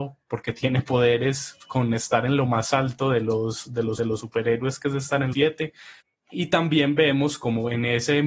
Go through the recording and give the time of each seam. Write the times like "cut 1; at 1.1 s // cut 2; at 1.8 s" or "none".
cut 1; at 4.0 s // cut 2; at 5.3 s // cut 3; at 6.0 s